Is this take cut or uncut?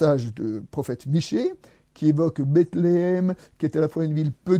uncut